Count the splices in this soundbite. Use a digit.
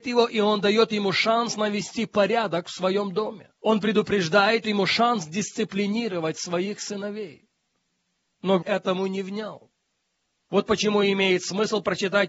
3